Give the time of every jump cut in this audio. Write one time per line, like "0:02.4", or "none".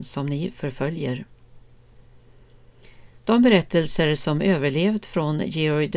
none